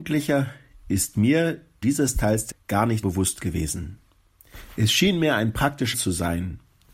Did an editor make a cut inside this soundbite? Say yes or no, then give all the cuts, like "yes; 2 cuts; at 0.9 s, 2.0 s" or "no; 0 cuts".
yes; 4 cuts; at 1.8 s, 2.5 s, 3.0 s, 5.9 s